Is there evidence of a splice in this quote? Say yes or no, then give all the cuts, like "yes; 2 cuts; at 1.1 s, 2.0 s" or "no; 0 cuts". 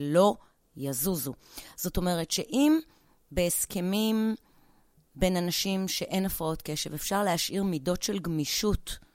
no; 0 cuts